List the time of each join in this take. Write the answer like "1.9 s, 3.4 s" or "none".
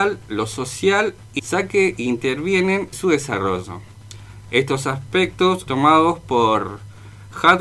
1.4 s, 2.9 s, 5.7 s